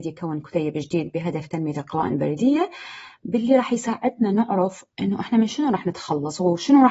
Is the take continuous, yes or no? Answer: no